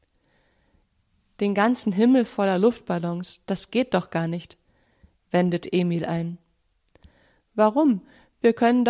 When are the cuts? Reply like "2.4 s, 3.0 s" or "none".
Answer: none